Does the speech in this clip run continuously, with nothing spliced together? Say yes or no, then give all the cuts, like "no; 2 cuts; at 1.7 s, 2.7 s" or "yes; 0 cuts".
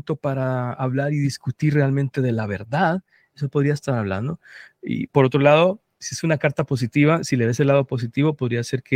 yes; 0 cuts